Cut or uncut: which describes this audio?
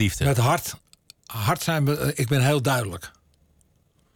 uncut